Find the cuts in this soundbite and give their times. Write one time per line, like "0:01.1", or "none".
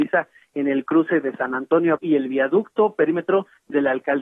0:02.0